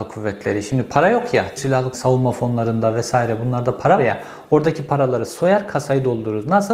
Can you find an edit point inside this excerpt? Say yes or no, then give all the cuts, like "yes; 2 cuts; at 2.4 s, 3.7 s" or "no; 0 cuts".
yes; 3 cuts; at 1.6 s, 1.9 s, 4.0 s